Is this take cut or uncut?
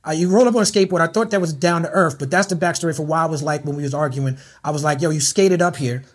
uncut